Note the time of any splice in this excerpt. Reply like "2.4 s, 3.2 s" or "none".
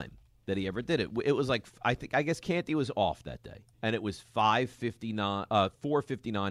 3.7 s